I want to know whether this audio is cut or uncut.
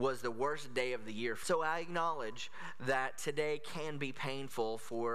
cut